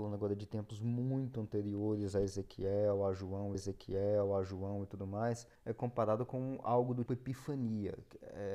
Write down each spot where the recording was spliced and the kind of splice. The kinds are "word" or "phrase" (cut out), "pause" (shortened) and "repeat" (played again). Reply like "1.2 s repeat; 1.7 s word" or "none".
3.5 s repeat; 5.6 s pause; 7.1 s word